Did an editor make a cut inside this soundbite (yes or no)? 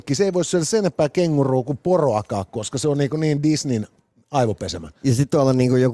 no